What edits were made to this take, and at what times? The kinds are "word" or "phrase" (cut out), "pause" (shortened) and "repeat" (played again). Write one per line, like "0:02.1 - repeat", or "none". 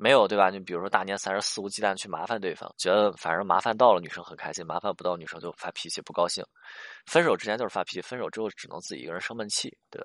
0:02.7 - pause